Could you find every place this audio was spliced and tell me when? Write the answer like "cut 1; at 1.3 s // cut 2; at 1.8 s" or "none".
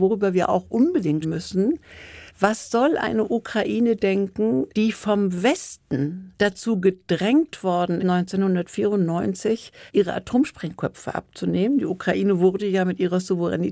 cut 1; at 1.2 s // cut 2; at 2.3 s // cut 3; at 4.7 s // cut 4; at 6.4 s // cut 5; at 8.0 s // cut 6; at 9.9 s